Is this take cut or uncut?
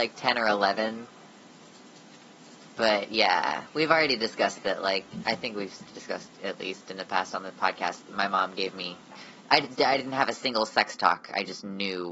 cut